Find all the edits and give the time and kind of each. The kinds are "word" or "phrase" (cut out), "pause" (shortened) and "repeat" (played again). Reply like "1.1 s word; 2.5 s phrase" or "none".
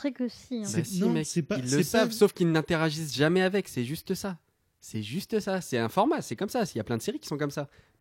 none

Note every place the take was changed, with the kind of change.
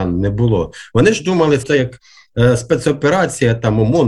1.6 s word

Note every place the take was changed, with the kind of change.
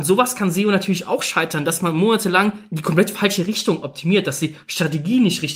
none

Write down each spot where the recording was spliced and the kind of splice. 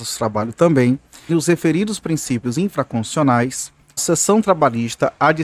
1.3 s word; 4.0 s word

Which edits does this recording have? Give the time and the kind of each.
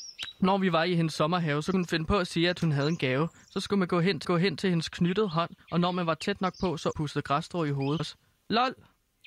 1.7 s word; 4.2 s repeat; 5.6 s pause; 6.9 s phrase; 8.0 s word

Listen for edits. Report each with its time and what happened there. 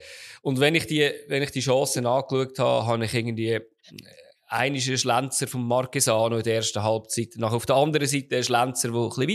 none

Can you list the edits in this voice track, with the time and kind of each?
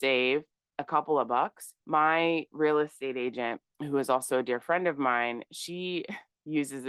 1.8 s pause; 3.7 s pause

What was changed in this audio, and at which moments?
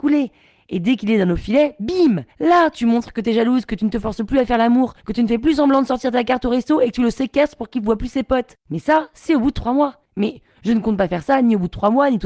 2.3 s pause; 5.0 s pause; 8.6 s pause; 10.0 s pause

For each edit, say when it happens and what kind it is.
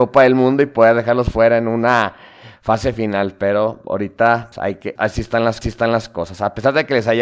4.5 s word; 5.0 s word; 5.6 s repeat

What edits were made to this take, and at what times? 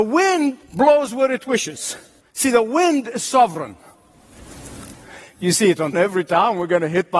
2.2 s pause; 5.9 s word

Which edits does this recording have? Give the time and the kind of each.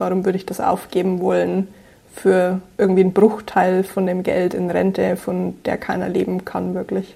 none

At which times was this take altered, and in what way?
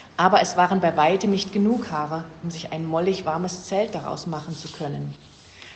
none

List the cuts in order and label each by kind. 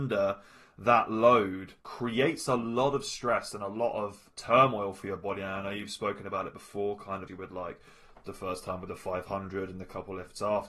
1.8 s pause; 4.3 s word; 7.3 s word

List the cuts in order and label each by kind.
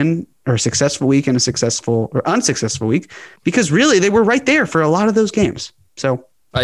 3.4 s pause

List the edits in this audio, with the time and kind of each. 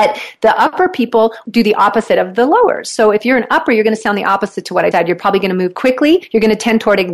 4.9 s word

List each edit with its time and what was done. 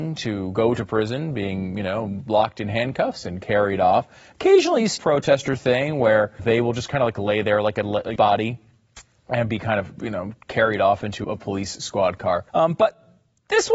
5.0 s word; 6.4 s word; 8.2 s phrase; 10.0 s word; 11.2 s word; 12.5 s pause

